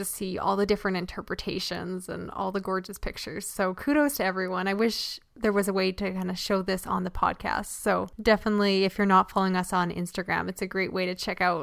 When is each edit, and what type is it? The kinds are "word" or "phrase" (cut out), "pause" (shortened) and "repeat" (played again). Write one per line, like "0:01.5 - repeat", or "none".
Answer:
none